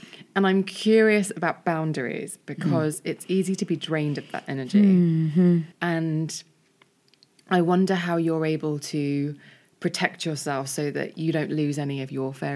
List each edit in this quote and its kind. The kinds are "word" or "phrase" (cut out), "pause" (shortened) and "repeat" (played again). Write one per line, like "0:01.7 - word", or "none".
0:05.7 - pause